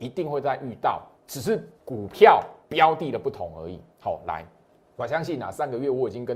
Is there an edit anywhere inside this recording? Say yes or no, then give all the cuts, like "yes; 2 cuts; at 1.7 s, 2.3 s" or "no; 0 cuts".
yes; 5 cuts; at 1.2 s, 1.8 s, 2.6 s, 3.9 s, 4.8 s